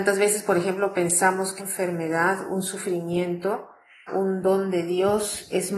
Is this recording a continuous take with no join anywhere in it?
no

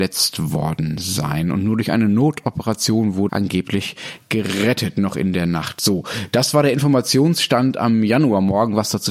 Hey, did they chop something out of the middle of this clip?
yes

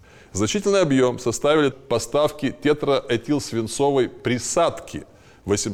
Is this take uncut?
no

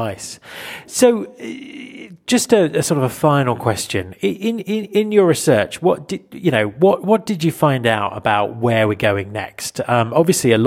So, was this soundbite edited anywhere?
no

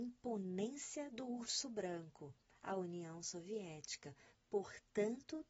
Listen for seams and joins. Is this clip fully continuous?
yes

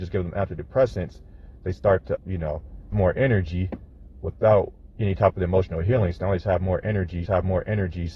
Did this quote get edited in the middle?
yes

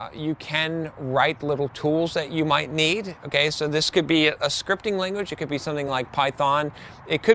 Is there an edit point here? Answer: no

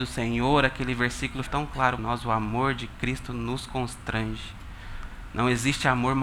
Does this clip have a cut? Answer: yes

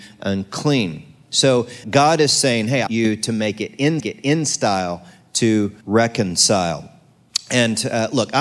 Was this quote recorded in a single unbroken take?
no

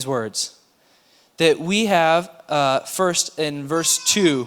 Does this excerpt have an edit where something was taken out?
no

